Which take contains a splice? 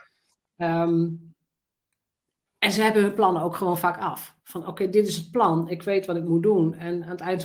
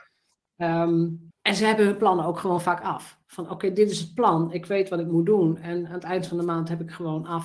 second; 1 cut; at 1.3 s

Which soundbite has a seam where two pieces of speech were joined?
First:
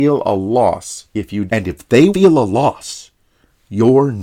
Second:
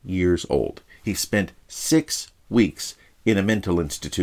first; 2 cuts; at 1.5 s, 2.1 s

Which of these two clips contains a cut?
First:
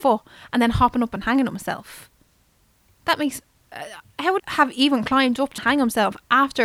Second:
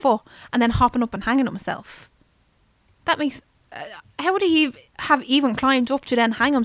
first; 2 cuts; at 4.4 s, 5.6 s

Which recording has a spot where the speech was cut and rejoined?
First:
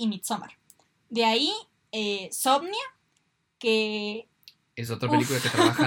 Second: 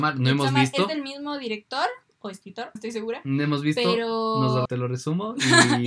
second; 2 cuts; at 2.8 s, 4.7 s

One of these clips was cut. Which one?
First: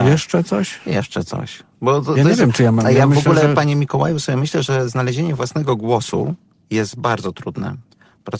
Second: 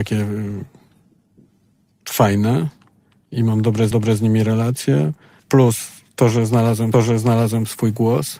second; 3 cuts; at 3.9 s, 5.4 s, 6.9 s

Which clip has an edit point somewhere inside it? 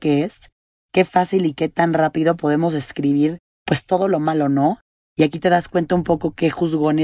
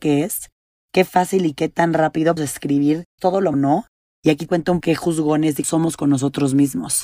second; 6 cuts; at 2.4 s, 3.2 s, 3.5 s, 4.5 s, 4.8 s, 5.6 s

